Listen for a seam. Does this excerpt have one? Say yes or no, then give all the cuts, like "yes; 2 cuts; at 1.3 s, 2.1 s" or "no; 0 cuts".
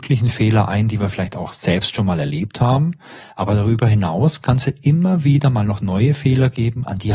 no; 0 cuts